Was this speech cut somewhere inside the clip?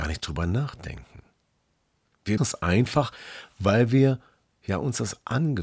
yes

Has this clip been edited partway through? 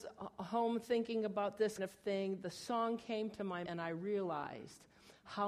yes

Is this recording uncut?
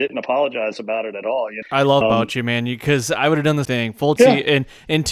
no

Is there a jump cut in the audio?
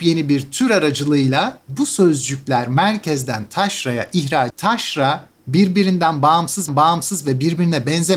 yes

